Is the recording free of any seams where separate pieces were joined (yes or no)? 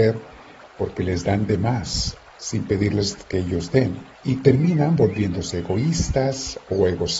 no